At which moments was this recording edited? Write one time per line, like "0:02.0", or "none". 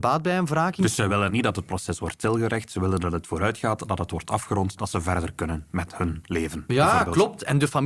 0:01.3